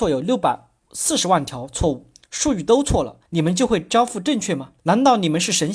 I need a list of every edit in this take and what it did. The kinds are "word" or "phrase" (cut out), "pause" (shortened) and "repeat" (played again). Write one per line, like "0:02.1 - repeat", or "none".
0:03.3 - pause
0:04.8 - pause